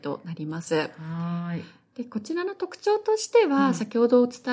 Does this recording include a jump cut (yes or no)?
no